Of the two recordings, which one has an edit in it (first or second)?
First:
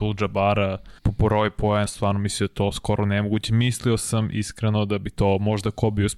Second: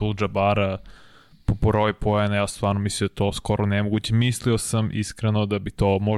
first